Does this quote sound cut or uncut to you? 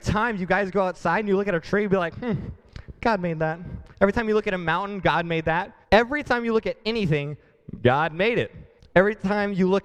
cut